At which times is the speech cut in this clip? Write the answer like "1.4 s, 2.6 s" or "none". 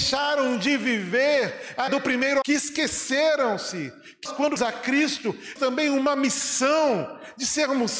1.9 s, 2.4 s, 4.2 s, 4.6 s, 5.6 s